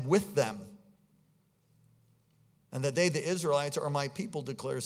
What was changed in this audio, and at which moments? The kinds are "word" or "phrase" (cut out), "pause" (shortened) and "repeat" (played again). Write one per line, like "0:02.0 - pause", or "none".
none